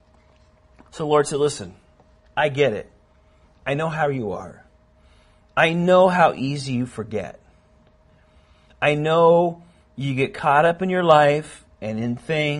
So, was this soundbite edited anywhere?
no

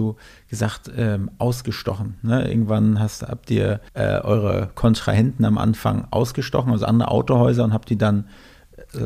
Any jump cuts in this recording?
yes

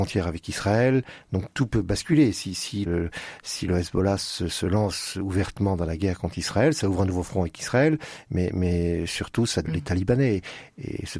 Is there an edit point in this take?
yes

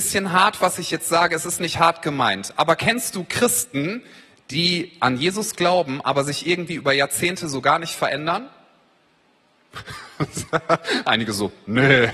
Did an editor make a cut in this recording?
no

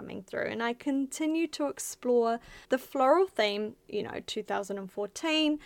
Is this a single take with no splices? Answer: no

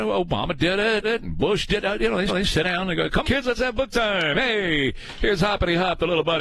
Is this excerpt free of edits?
no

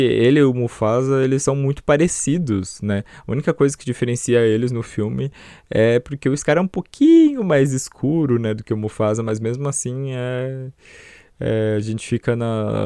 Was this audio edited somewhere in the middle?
no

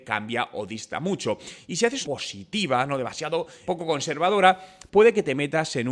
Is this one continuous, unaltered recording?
no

